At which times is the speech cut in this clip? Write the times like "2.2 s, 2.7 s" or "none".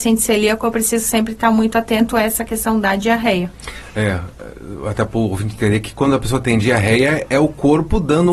none